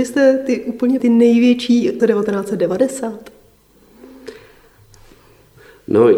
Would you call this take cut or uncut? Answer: cut